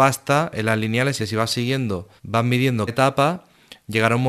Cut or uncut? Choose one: cut